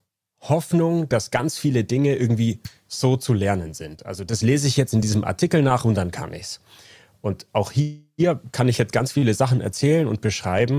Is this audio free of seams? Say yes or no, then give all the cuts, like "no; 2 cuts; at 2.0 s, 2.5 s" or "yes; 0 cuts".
yes; 0 cuts